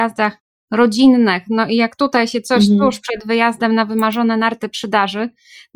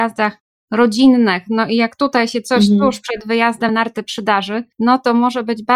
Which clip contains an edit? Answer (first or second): second